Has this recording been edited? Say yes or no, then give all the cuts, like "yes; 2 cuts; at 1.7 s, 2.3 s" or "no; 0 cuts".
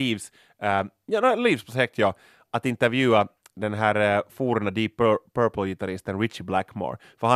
no; 0 cuts